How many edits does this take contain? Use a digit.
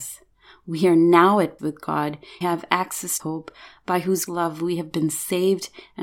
4